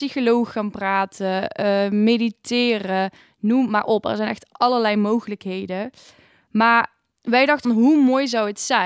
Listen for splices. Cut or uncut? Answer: cut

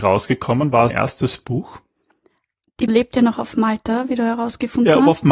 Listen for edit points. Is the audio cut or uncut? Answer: cut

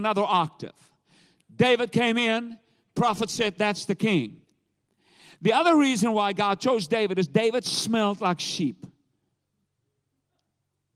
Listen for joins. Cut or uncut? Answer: uncut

